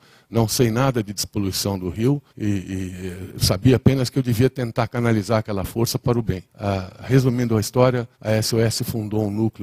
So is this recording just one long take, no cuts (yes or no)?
no